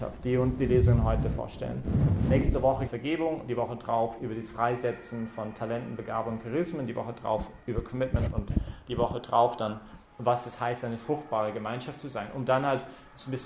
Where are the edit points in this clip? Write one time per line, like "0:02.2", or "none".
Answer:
0:02.9
0:10.1